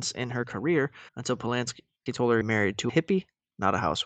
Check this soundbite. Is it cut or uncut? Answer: cut